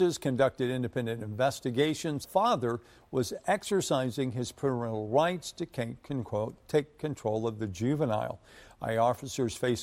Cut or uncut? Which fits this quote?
cut